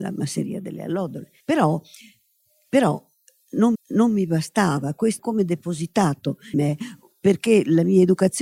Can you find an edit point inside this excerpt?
yes; 4 cuts; at 1.4 s, 3.7 s, 5.2 s, 6.5 s

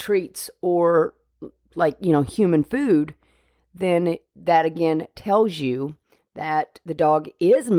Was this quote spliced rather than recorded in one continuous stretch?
no; 0 cuts

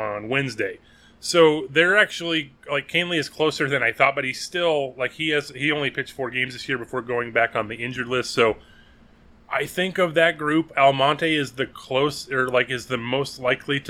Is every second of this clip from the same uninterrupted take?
yes; 0 cuts

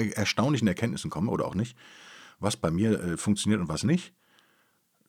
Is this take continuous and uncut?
yes; 0 cuts

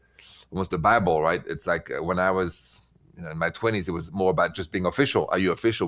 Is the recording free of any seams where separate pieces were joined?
yes; 0 cuts

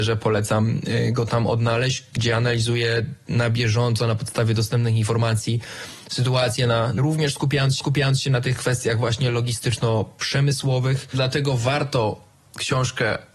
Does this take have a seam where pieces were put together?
yes; 2 cuts; at 7.0 s, 7.8 s

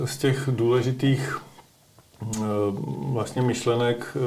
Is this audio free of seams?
yes; 0 cuts

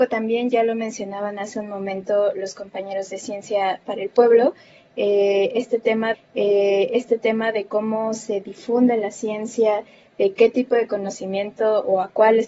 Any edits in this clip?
yes; 1 cut; at 6.1 s

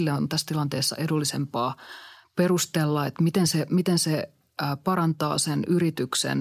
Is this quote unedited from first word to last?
yes; 0 cuts

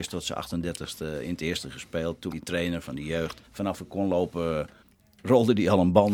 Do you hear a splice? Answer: yes; 3 cuts; at 2.3 s, 3.4 s, 4.8 s

